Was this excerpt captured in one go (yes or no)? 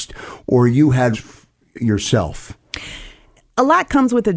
no